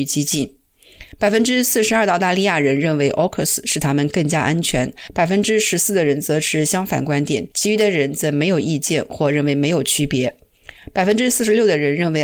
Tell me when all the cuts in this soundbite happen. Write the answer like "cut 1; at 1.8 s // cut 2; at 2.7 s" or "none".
cut 1; at 1.1 s // cut 2; at 7.5 s

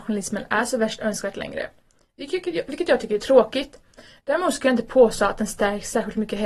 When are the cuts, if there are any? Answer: none

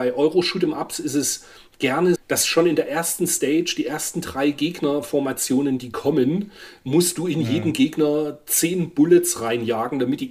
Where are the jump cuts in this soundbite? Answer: cut 1; at 2.2 s

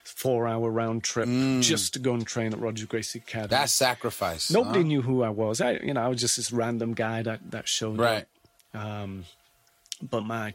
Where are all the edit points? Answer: none

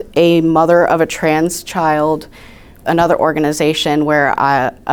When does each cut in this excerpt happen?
cut 1; at 2.8 s

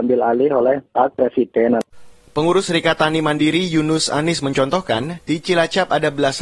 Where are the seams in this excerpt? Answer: none

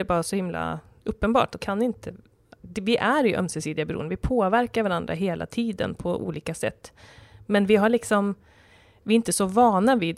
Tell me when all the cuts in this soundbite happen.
cut 1; at 1.6 s

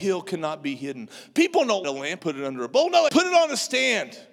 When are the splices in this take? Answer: cut 1; at 1.8 s // cut 2; at 2.2 s // cut 3; at 3.1 s

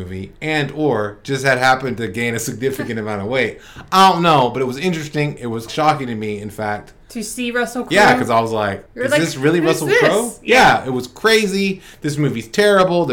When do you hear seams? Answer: cut 1; at 5.7 s // cut 2; at 8.9 s

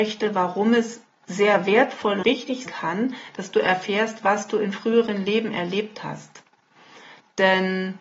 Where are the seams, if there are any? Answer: cut 1; at 2.2 s // cut 2; at 2.7 s

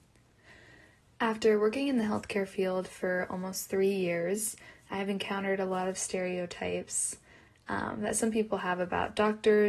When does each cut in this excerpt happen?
none

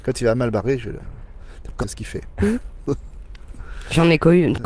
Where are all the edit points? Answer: cut 1; at 1.8 s

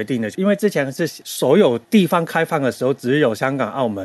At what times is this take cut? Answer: cut 1; at 1.8 s

